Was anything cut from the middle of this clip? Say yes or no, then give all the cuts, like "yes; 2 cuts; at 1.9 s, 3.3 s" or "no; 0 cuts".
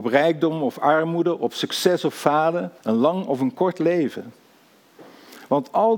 yes; 1 cut; at 2.8 s